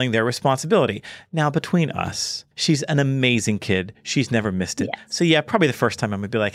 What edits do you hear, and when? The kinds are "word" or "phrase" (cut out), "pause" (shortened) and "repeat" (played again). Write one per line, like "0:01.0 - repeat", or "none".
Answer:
0:02.5 - pause

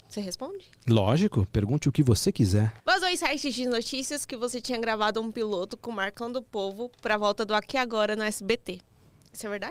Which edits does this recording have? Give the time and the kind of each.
0:02.8 - pause

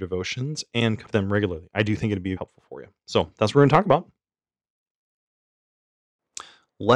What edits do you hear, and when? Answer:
0:01.1 - word
0:02.4 - word

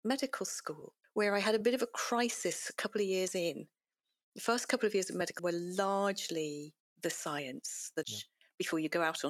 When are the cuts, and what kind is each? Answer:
0:01.0 - pause
0:05.4 - word
0:08.0 - word

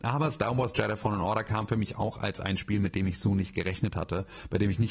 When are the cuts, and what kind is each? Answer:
none

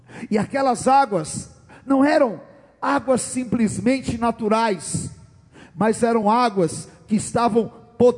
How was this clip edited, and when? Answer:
none

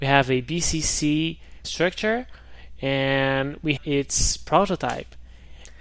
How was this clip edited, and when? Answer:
0:01.6 - word
0:03.8 - word

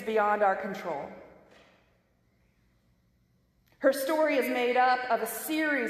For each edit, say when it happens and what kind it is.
none

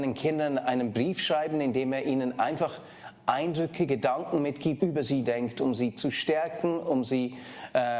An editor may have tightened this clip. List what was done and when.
0:04.8 - phrase

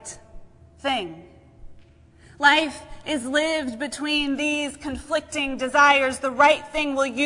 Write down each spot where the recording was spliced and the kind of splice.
none

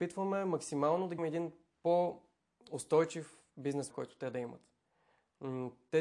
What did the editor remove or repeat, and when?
0:01.2 - phrase
0:03.9 - word

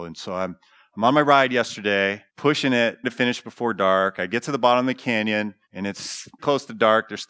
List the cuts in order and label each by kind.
0:02.3 - pause
0:03.0 - word
0:05.6 - pause
0:06.4 - word

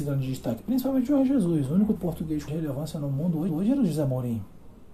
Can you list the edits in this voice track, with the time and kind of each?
0:02.0 - word
0:02.5 - word
0:03.5 - repeat

